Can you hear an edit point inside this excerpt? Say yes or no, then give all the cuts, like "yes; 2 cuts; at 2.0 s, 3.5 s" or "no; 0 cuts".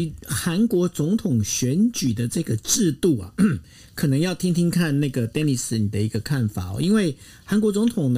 no; 0 cuts